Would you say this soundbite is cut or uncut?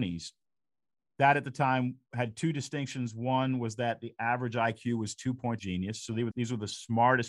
cut